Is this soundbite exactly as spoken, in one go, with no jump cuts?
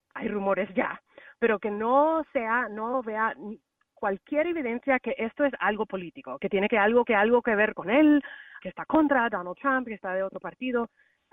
no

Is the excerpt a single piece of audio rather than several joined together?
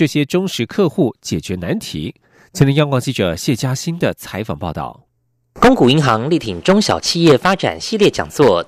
yes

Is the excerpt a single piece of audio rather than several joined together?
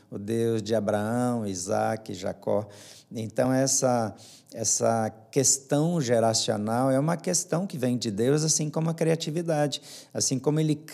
yes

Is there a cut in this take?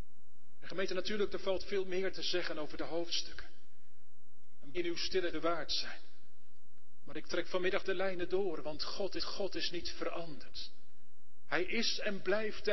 yes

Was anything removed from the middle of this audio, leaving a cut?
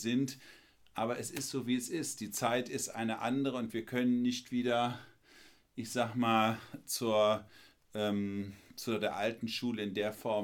no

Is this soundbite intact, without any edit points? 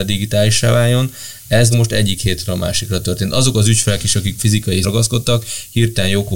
no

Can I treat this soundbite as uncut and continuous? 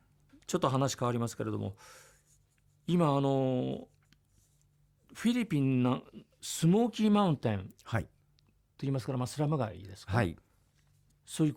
yes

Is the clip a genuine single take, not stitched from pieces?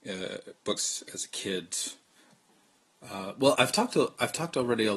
no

